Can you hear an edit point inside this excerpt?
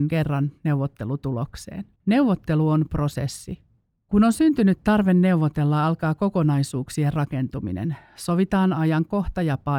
yes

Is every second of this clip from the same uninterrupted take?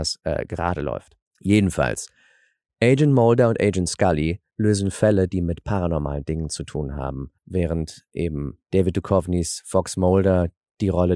no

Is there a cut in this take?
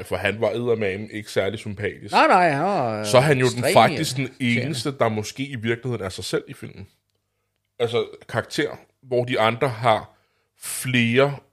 no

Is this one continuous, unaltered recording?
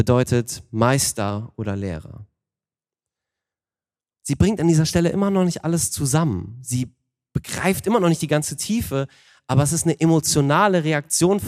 yes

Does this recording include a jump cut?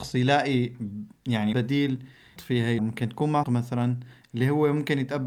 yes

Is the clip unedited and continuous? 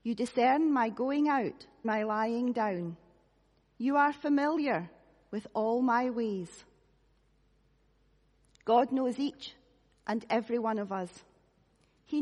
no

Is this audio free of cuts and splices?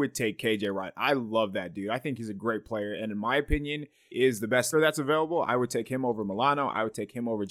no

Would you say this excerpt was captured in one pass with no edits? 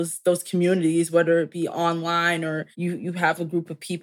no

